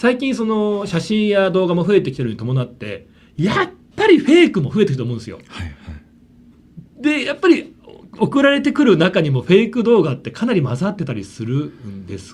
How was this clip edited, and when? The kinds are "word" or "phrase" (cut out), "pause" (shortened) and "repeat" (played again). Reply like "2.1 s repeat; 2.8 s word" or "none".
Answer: none